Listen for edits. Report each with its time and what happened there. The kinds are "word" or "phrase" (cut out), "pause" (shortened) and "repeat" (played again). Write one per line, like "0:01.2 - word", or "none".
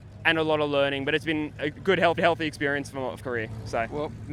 0:01.7 - word
0:02.2 - repeat
0:03.2 - word